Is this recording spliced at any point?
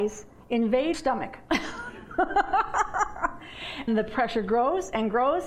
yes; 2 cuts; at 0.9 s, 3.9 s

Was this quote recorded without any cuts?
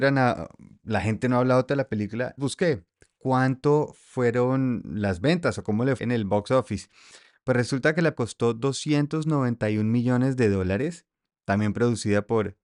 no; 4 cuts; at 1.7 s, 2.4 s, 6.0 s, 8.1 s

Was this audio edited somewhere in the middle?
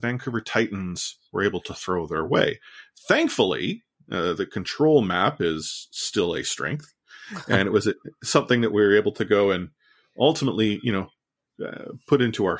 no; 0 cuts

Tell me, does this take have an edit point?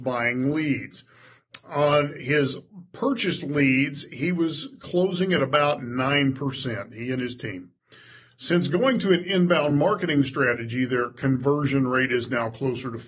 no; 0 cuts

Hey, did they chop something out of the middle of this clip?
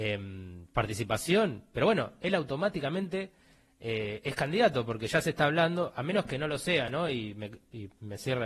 no; 0 cuts

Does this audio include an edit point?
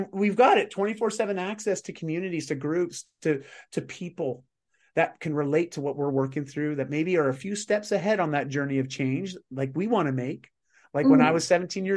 no; 0 cuts

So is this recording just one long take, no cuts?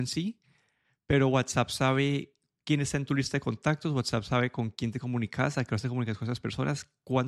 yes; 0 cuts

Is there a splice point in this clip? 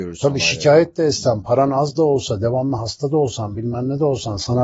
no; 0 cuts

